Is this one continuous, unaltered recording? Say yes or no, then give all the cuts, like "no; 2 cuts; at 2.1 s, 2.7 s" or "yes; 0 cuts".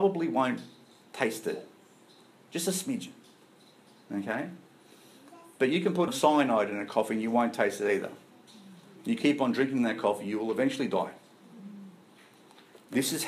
no; 1 cut; at 6.1 s